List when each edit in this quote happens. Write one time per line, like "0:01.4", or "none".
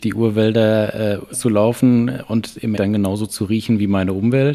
0:01.3
0:02.8